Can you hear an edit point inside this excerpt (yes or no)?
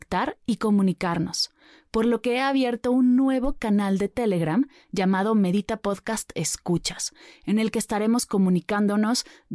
no